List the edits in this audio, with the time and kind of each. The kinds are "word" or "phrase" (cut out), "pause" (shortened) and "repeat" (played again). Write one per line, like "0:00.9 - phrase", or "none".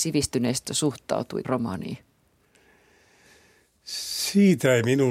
0:01.4 - word

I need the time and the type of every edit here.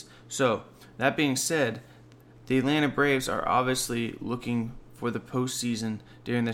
none

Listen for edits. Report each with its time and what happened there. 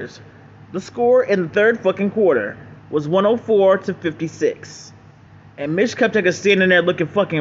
0:02.8 - pause
0:05.3 - pause

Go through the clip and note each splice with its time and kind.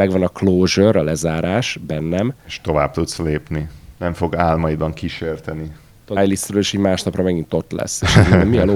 0:02.4 - pause
0:06.2 - phrase

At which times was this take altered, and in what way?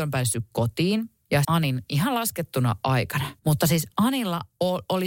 0:01.4 - word
0:03.4 - pause

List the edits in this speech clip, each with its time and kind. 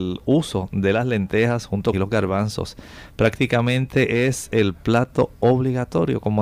0:01.9 - phrase

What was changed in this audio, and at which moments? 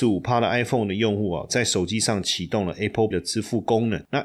0:03.1 - word

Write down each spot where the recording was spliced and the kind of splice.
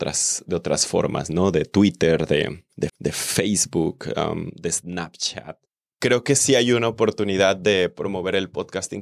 0:02.9 - repeat
0:05.8 - pause

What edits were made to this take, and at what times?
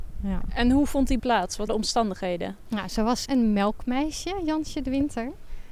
0:01.2 - word
0:01.7 - word
0:03.3 - word

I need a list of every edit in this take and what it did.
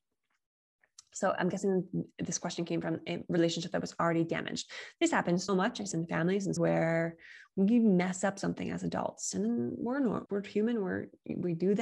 0:05.5 - word
0:05.9 - word
0:06.6 - word
0:10.3 - word

